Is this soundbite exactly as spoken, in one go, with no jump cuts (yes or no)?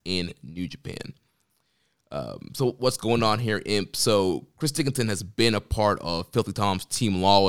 yes